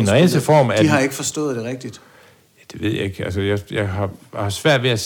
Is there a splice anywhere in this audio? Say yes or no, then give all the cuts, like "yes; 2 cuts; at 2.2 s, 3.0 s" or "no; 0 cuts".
no; 0 cuts